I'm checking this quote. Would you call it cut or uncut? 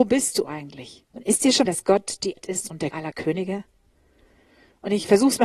cut